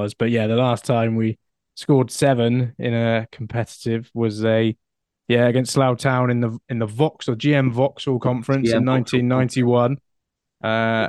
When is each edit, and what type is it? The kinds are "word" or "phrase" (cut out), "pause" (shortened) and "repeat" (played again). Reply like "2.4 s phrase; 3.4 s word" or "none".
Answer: none